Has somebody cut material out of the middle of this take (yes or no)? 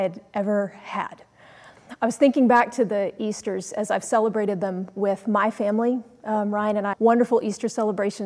yes